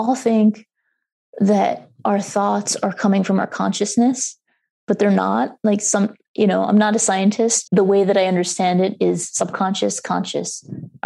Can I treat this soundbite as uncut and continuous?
no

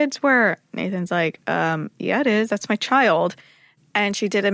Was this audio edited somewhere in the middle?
no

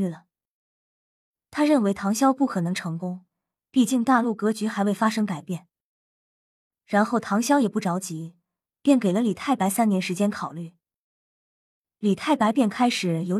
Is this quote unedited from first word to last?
yes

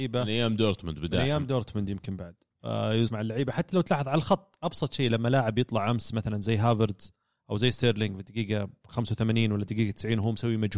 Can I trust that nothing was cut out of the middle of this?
no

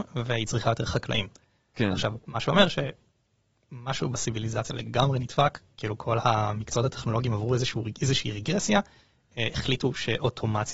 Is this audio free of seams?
yes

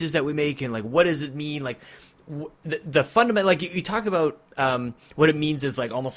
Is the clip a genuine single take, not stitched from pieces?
no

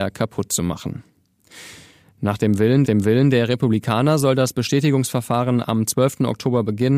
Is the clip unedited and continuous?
no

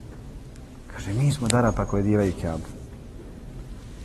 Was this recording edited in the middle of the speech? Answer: no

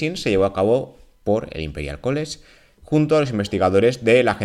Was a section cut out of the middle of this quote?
no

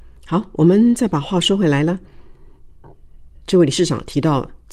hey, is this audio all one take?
no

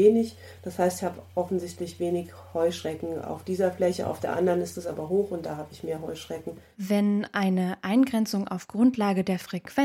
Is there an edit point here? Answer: no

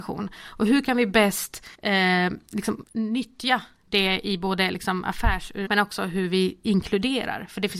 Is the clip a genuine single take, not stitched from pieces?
no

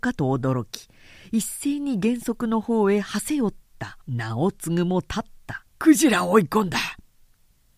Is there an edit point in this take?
yes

